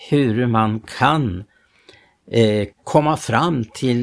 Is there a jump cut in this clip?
yes; 1 cut; at 2.7 s

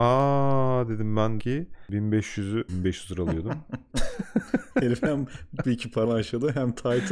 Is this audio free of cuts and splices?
no; 4 cuts; at 1.4 s, 2.7 s, 5.6 s, 6.1 s

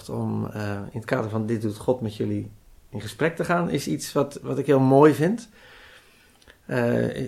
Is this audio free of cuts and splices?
yes; 0 cuts

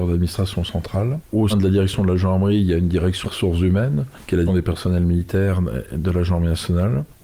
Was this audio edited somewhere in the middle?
yes; 3 cuts; at 1.5 s, 3.2 s, 4.5 s

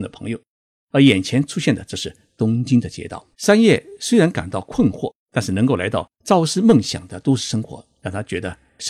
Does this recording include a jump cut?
yes; 3 cuts; at 3.3 s, 5.2 s, 6.1 s

